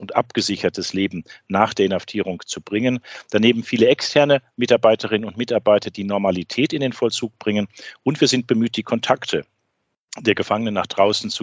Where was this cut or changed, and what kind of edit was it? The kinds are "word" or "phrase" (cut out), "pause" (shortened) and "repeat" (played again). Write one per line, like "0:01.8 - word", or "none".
none